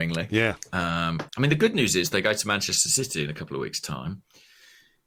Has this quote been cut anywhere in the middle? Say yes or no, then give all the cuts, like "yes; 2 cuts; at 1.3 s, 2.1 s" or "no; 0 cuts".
yes; 1 cut; at 1.3 s